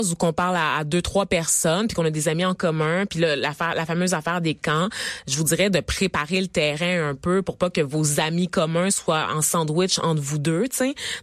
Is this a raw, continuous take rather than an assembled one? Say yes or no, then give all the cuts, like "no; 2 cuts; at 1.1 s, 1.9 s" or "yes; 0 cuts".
yes; 0 cuts